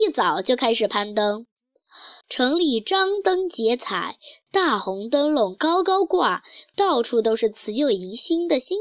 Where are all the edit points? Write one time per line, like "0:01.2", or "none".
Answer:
0:02.2